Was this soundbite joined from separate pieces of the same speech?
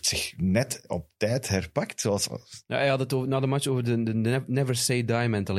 no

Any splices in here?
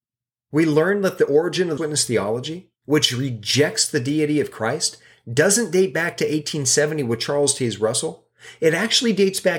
yes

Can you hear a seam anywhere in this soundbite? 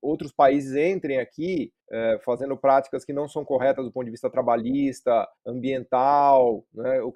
yes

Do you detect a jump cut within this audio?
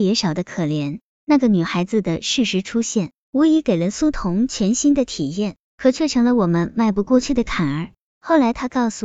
no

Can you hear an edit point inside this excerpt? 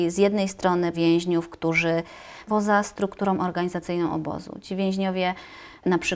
yes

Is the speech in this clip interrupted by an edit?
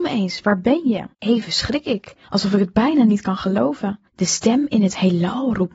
yes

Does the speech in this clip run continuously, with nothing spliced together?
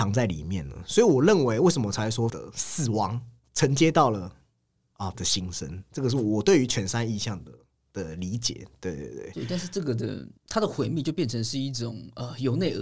no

